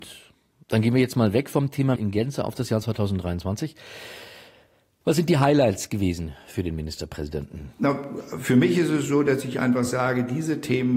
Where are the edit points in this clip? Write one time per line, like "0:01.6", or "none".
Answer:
0:02.0